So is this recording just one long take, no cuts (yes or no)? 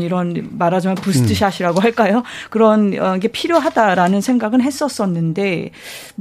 yes